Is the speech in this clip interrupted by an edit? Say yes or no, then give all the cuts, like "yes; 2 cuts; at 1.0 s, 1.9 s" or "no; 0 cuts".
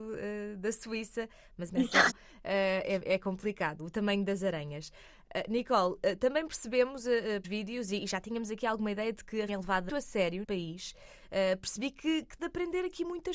yes; 8 cuts; at 1.7 s, 2.1 s, 3.8 s, 7.4 s, 9.5 s, 9.9 s, 10.4 s, 12.4 s